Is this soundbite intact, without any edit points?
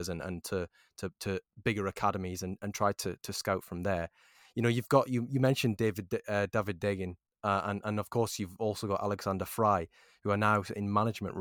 yes; 0 cuts

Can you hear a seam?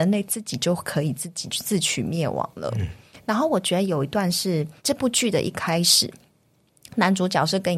yes; 1 cut; at 4.8 s

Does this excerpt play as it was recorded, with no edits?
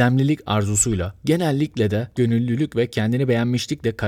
no; 1 cut; at 2.1 s

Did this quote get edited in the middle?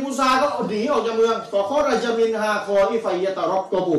no; 0 cuts

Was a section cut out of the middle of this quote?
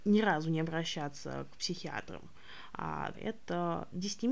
yes; 1 cut; at 3.1 s

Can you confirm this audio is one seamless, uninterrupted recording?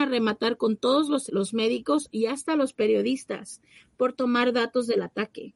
no; 1 cut; at 1.3 s

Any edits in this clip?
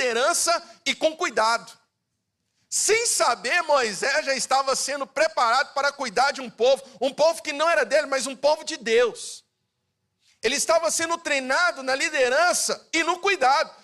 no; 0 cuts

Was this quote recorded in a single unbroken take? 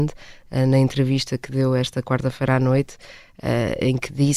yes; 0 cuts

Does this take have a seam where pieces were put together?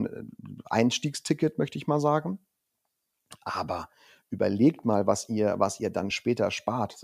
no; 0 cuts

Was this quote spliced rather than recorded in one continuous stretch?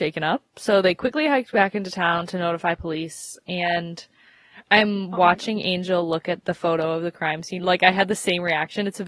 yes; 2 cuts; at 4.6 s, 7.6 s

